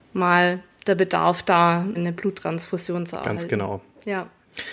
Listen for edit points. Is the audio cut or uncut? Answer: cut